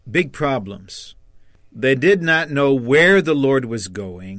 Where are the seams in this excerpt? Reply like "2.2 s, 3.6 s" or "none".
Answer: none